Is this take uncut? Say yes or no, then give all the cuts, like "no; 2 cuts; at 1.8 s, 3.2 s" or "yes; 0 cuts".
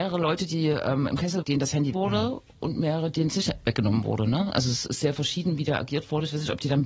no; 2 cuts; at 1.4 s, 1.9 s